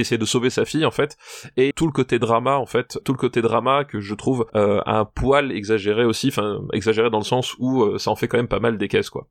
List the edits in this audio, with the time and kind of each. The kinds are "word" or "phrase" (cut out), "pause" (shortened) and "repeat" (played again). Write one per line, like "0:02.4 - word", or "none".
0:01.7 - word
0:03.0 - word
0:04.5 - pause